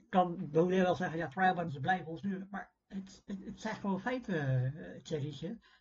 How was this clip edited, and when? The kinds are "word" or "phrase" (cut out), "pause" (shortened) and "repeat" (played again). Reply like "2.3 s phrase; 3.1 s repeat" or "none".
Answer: 1.7 s phrase; 2.2 s word

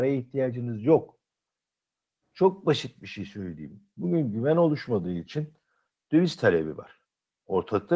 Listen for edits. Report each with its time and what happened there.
none

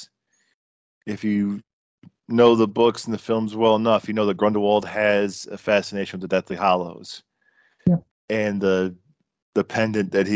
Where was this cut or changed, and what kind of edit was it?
8.1 s pause

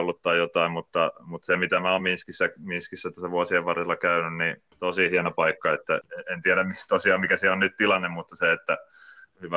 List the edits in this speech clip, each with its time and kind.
none

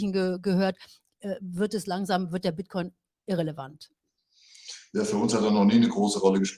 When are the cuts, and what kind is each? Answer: none

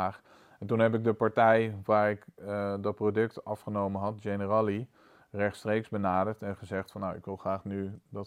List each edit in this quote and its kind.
none

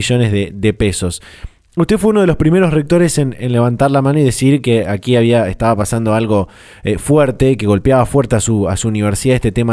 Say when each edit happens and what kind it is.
none

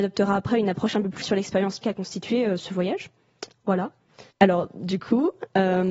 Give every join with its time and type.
1.2 s word; 1.8 s word; 2.6 s word; 4.3 s pause

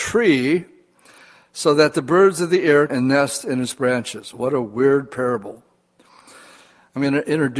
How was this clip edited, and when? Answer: 2.9 s word

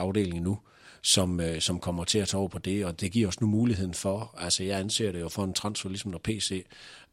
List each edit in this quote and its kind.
none

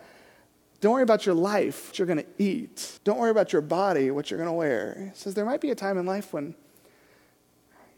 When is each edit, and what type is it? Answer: 1.9 s word; 3.0 s pause

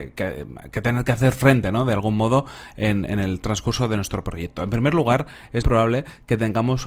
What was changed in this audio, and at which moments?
5.6 s word

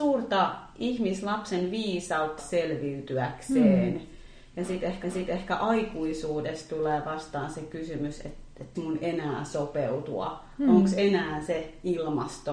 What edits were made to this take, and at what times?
2.4 s word; 5.0 s repeat; 8.7 s word

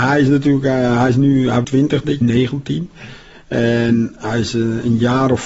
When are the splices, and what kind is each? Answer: 1.6 s word; 2.2 s phrase

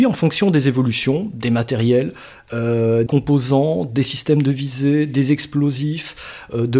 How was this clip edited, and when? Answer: 3.1 s word

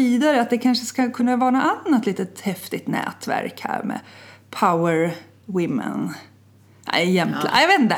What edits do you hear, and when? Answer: none

